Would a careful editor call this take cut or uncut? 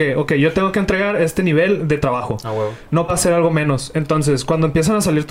cut